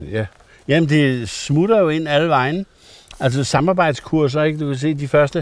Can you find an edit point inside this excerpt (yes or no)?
no